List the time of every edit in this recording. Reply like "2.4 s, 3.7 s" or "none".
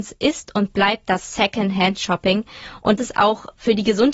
3.0 s